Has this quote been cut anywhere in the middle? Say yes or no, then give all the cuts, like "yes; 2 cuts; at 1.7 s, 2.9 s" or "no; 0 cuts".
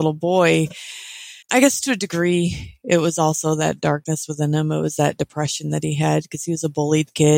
yes; 1 cut; at 1.4 s